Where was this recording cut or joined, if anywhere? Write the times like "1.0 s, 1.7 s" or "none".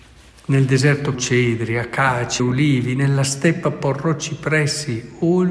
1.1 s, 2.4 s